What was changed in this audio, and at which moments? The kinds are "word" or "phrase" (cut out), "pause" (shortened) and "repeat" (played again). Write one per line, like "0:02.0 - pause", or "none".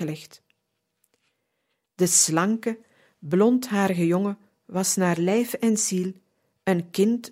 none